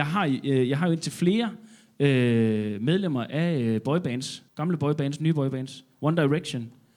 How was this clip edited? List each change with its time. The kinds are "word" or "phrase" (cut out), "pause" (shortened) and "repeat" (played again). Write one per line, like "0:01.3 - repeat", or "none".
0:04.5 - pause